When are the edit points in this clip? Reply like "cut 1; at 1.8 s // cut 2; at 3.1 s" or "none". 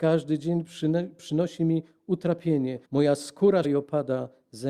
cut 1; at 2.8 s // cut 2; at 3.6 s